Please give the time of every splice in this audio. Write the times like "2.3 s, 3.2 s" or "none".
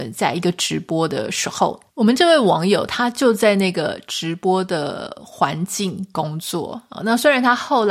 1.9 s